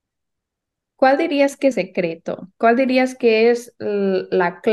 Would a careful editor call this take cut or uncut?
cut